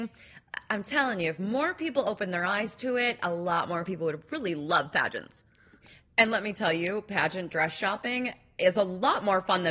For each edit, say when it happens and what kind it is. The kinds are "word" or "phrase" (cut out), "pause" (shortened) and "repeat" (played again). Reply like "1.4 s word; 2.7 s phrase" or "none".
none